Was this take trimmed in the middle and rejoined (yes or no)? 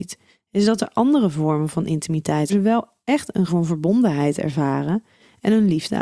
yes